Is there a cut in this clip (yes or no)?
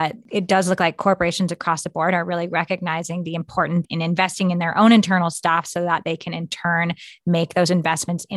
yes